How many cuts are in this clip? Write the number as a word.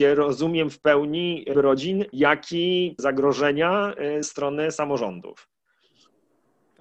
three